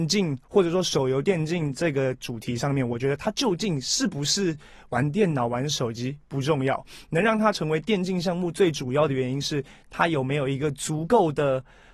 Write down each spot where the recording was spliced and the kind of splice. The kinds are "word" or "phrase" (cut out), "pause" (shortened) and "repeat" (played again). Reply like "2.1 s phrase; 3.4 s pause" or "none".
none